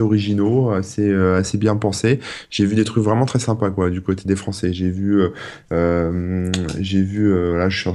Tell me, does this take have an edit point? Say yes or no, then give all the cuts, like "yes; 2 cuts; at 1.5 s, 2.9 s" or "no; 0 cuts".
no; 0 cuts